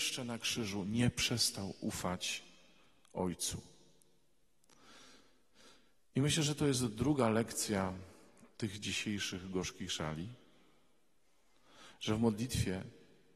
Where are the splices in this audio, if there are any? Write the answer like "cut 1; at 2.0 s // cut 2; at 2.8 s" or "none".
none